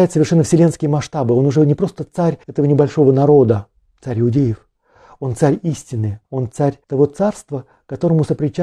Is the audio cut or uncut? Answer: cut